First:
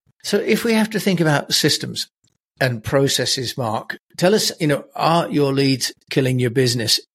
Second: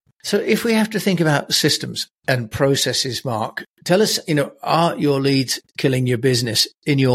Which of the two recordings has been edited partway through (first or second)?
second